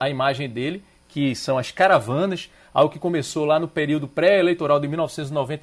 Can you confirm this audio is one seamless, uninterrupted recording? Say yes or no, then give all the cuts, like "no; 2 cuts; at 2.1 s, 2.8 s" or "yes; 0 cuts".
yes; 0 cuts